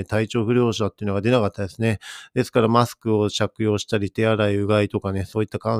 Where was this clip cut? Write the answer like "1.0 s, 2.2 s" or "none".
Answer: none